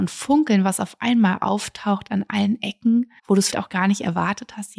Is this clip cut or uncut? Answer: cut